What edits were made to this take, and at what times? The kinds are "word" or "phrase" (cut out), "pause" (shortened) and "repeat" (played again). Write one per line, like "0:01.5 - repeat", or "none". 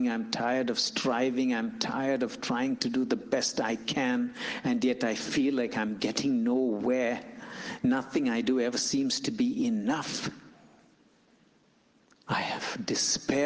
none